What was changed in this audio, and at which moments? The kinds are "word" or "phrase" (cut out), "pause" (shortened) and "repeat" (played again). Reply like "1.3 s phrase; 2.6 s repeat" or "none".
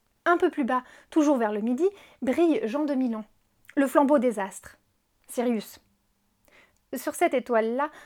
none